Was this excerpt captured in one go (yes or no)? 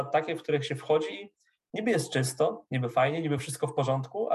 yes